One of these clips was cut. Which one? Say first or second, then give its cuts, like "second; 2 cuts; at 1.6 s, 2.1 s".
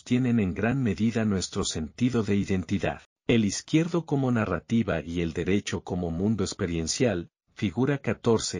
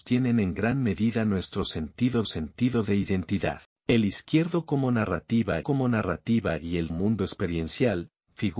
second; 3 cuts; at 2.2 s, 5.6 s, 6.9 s